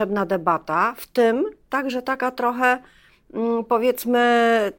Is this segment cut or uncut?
uncut